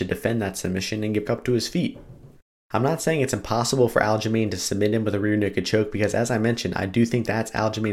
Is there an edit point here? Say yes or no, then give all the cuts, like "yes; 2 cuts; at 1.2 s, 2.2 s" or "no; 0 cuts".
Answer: yes; 1 cut; at 1.2 s